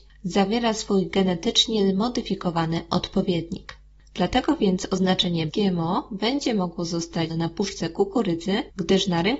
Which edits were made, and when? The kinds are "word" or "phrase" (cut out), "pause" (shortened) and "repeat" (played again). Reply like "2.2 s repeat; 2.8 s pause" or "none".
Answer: 5.5 s word; 7.3 s word